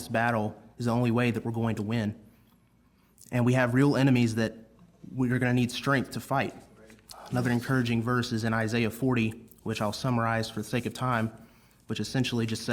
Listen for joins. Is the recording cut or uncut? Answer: uncut